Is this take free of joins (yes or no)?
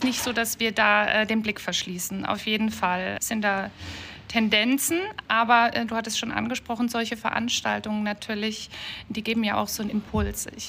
no